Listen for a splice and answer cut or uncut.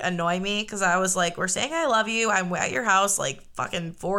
uncut